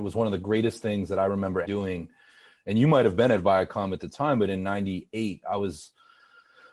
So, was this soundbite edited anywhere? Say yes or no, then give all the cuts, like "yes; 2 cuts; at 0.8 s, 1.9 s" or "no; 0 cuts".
yes; 1 cut; at 1.6 s